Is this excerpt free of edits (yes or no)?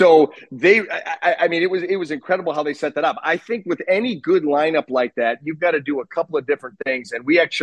yes